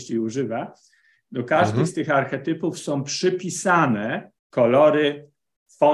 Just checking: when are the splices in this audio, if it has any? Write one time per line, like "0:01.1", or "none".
0:04.4